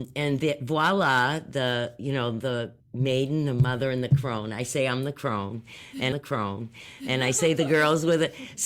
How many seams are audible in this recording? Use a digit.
2